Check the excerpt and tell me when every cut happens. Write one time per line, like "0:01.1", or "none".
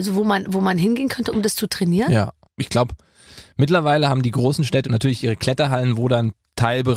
0:02.4
0:04.8